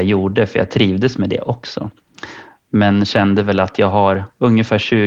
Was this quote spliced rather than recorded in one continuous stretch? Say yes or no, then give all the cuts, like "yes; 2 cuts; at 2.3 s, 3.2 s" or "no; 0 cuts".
no; 0 cuts